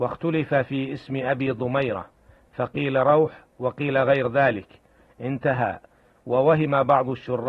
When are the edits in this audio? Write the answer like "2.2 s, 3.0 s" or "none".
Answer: none